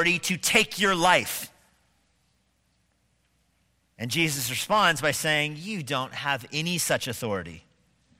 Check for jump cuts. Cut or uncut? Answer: uncut